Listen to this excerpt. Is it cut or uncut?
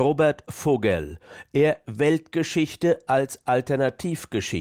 cut